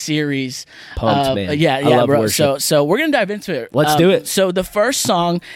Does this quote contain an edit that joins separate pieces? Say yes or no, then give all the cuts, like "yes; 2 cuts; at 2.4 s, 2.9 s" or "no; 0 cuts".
no; 0 cuts